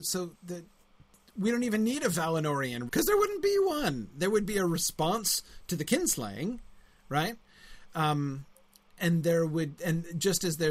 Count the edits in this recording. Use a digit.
1